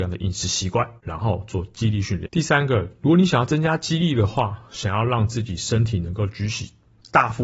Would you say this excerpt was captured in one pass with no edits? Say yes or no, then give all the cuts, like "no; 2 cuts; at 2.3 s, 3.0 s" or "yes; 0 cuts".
no; 1 cut; at 1.0 s